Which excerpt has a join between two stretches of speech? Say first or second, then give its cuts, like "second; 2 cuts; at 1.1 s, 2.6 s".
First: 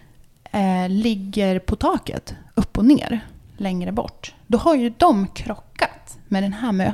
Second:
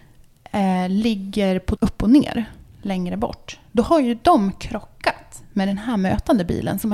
second; 1 cut; at 1.8 s